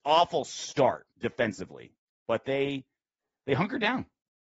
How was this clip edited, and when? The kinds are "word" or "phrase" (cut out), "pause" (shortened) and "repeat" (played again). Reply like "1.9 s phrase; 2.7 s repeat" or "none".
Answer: none